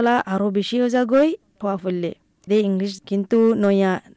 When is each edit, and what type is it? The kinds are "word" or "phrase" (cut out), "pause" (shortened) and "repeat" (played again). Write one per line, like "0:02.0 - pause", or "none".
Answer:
0:01.6 - word
0:02.5 - word
0:03.0 - word